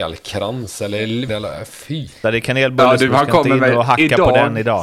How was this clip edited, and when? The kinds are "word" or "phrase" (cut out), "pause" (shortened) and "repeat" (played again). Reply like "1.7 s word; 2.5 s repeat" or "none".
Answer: 1.3 s word; 2.2 s word; 3.1 s word